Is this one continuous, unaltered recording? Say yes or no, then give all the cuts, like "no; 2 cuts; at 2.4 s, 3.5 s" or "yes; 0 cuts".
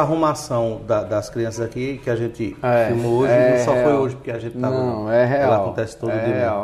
yes; 0 cuts